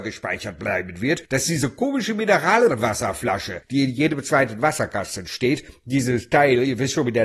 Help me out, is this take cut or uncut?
uncut